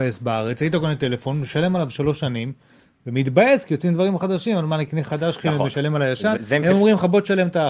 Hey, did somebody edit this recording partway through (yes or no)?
yes